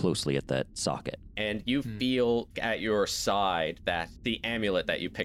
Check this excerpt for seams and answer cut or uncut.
uncut